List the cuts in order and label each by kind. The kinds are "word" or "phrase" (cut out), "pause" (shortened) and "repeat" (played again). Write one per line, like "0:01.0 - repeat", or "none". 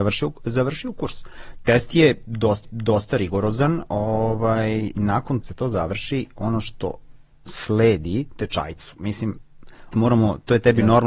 0:02.6 - repeat
0:05.0 - word
0:05.4 - phrase
0:07.3 - pause
0:09.9 - word